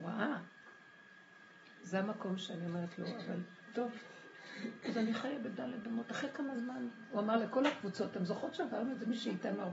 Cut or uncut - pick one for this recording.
uncut